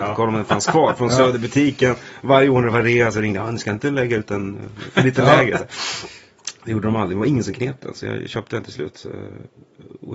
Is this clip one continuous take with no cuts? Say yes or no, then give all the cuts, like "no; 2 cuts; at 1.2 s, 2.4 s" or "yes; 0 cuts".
yes; 0 cuts